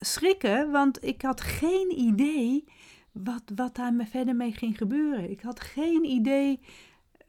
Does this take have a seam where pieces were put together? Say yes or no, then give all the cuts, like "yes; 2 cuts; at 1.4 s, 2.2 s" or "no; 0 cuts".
no; 0 cuts